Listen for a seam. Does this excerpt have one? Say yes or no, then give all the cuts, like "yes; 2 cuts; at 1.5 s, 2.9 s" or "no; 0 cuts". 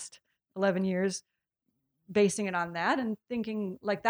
no; 0 cuts